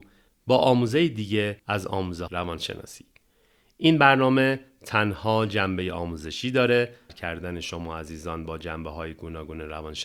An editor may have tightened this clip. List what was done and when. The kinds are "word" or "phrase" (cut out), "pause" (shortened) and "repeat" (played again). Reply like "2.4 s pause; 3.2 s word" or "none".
1.6 s pause; 2.3 s phrase; 7.1 s phrase

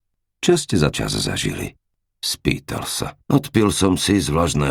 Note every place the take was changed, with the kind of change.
0.9 s word; 2.0 s pause; 3.2 s pause

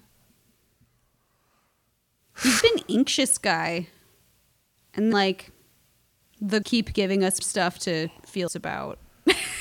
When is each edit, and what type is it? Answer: 2.6 s word; 5.1 s word; 6.6 s word; 7.4 s word; 8.5 s word

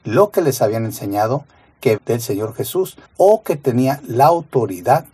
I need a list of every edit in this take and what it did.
2.0 s word; 3.1 s pause

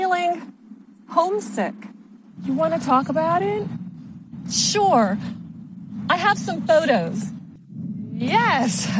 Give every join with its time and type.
none

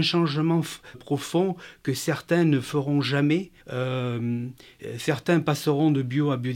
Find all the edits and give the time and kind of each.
0.9 s word; 3.6 s pause

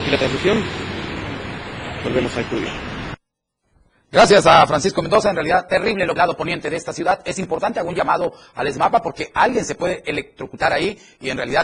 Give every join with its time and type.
6.2 s phrase

